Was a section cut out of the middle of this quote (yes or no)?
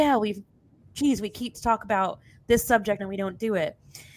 yes